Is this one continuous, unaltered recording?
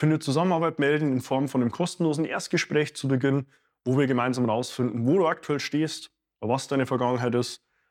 yes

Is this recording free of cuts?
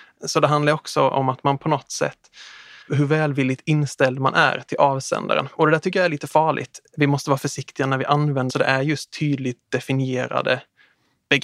no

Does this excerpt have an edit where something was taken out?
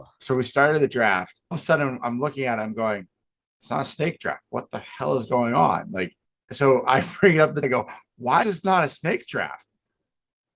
yes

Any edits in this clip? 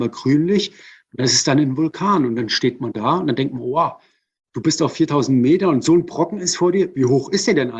no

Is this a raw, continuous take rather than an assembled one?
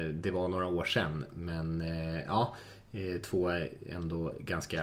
yes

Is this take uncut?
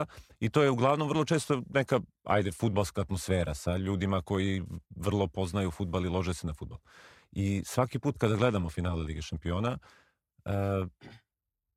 no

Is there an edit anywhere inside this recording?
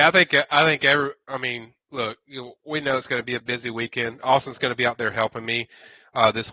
yes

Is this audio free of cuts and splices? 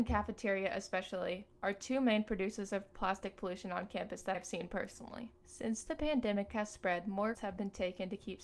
no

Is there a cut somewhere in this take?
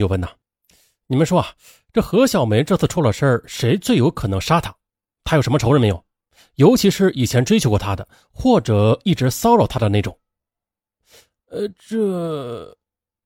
no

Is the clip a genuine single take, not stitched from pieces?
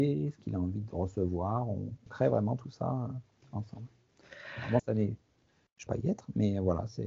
no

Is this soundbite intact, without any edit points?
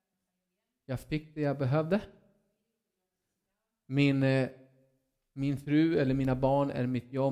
yes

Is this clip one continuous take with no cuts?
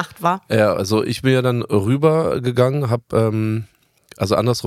yes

